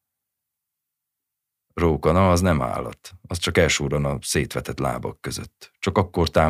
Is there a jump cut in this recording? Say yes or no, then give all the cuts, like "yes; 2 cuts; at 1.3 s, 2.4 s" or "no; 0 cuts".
no; 0 cuts